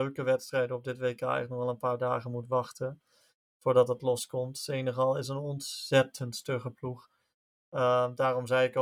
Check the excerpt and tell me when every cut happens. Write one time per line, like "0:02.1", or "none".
none